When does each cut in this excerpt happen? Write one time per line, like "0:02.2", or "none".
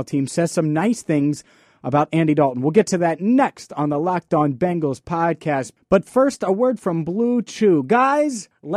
none